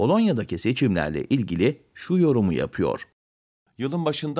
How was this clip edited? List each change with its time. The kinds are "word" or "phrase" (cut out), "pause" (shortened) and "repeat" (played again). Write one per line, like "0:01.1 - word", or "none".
none